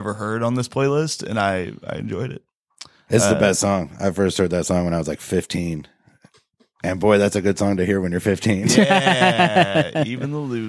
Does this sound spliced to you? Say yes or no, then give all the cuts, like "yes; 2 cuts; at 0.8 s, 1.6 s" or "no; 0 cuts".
no; 0 cuts